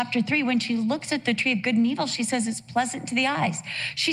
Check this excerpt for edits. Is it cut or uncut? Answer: uncut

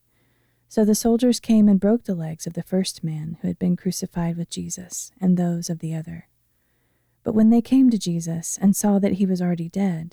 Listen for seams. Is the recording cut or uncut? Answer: uncut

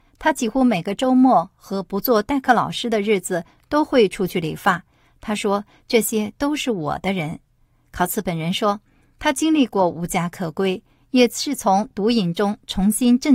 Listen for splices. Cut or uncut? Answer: uncut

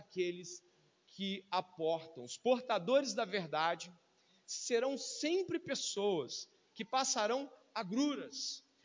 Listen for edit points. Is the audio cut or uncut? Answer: uncut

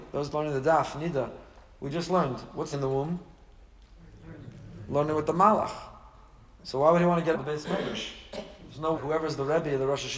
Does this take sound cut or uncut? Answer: cut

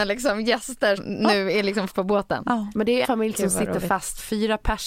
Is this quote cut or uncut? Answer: cut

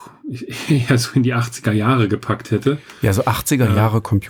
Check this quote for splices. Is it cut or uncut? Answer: uncut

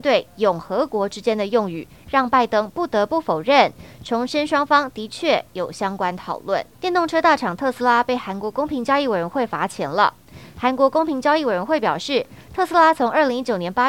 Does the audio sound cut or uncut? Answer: cut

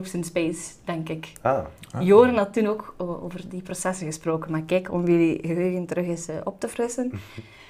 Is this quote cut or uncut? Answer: uncut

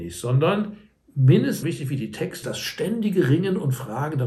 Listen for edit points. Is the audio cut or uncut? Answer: cut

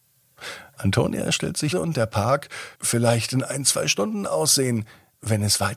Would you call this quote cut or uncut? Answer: cut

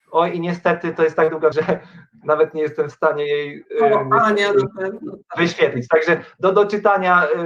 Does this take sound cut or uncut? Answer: cut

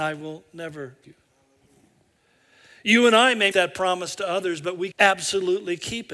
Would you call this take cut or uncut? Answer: cut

